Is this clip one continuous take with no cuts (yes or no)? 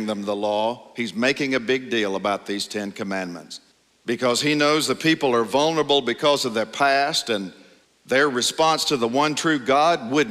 no